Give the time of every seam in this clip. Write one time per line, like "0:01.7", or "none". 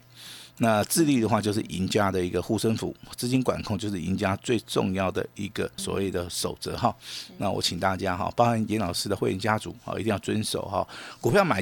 0:05.8